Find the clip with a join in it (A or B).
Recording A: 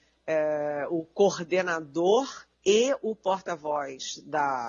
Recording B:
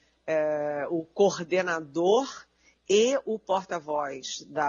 A